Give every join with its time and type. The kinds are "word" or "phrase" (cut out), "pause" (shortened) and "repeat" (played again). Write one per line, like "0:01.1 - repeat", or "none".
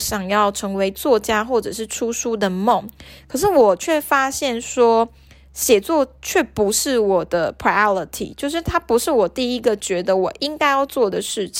none